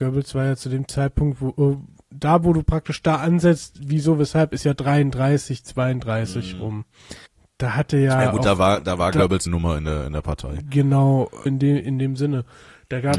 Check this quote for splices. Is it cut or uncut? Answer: cut